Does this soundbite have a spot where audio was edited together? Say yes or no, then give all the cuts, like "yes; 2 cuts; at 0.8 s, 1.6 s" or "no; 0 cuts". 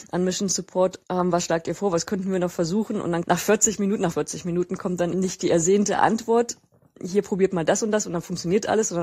yes; 3 cuts; at 3.2 s, 4.1 s, 5.1 s